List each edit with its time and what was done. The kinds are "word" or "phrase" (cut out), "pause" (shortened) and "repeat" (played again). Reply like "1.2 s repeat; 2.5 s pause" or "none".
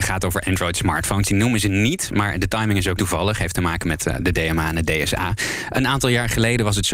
3.0 s word